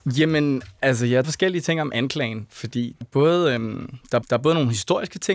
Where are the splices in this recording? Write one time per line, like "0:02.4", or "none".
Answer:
0:01.2
0:03.0
0:04.2